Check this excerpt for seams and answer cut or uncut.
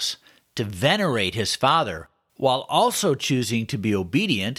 uncut